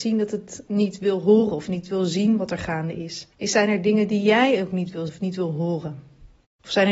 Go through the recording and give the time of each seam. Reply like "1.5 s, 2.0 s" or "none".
3.3 s, 5.1 s